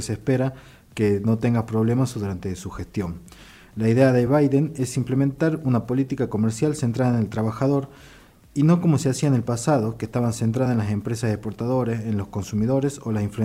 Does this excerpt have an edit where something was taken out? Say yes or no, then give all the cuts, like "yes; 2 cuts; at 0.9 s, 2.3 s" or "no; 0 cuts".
no; 0 cuts